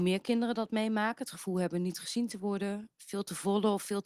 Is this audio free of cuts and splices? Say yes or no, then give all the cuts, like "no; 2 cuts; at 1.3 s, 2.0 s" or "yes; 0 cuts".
yes; 0 cuts